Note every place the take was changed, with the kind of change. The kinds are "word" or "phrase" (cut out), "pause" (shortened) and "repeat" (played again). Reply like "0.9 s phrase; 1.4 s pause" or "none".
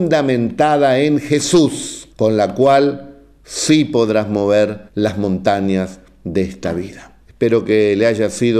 2.1 s pause; 4.9 s pause; 7.2 s pause